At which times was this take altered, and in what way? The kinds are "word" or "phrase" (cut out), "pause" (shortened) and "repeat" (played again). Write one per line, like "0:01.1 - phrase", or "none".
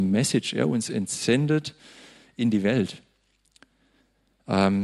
none